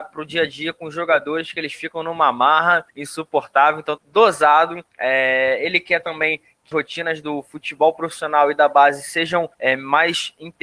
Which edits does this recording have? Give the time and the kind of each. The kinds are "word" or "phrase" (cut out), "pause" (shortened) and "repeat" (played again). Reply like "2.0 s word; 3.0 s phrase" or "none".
2.9 s pause; 4.0 s phrase; 4.9 s pause; 6.7 s word; 9.5 s pause